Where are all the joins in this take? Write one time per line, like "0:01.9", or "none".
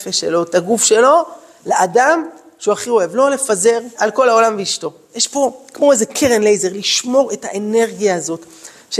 0:03.9